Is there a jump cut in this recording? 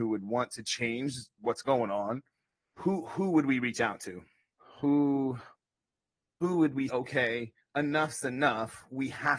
yes; 3 cuts; at 2.5 s, 6.9 s, 7.6 s

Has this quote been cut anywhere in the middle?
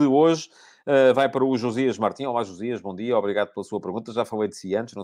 no; 0 cuts

